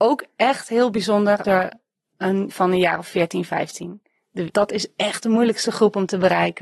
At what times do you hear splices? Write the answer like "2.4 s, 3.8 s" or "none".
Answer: 1.4 s, 2.5 s, 4.5 s